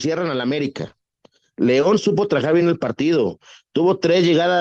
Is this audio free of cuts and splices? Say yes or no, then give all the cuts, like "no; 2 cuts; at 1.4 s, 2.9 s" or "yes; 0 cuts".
yes; 0 cuts